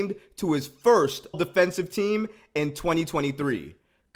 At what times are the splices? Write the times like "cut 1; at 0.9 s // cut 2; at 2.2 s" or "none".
cut 1; at 1.3 s